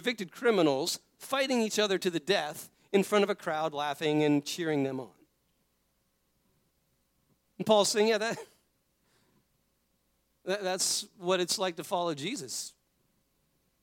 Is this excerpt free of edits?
yes; 0 cuts

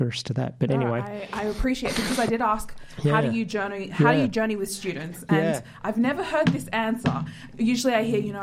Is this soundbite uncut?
yes; 0 cuts

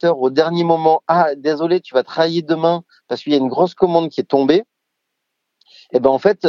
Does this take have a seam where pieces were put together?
no; 0 cuts

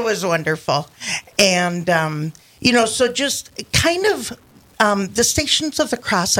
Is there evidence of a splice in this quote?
no; 0 cuts

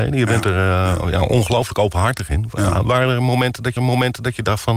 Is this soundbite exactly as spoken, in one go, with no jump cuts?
no; 1 cut; at 3.8 s

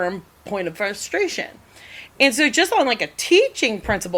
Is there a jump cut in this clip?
no; 0 cuts

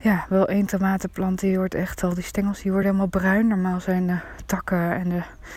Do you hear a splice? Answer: no; 0 cuts

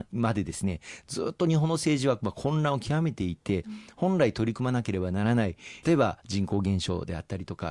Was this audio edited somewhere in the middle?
yes; 1 cut; at 5.8 s

